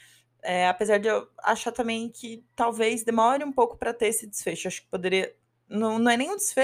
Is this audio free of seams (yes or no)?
yes